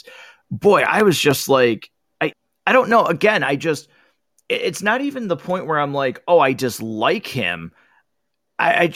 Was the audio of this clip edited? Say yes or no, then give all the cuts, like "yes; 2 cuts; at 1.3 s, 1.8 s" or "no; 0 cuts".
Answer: no; 0 cuts